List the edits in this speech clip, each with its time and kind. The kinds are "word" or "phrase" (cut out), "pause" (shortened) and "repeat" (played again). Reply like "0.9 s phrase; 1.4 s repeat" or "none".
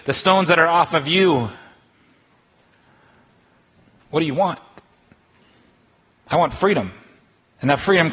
none